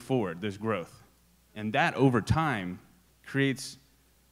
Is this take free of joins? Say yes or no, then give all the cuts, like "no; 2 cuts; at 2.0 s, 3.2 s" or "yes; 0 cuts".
yes; 0 cuts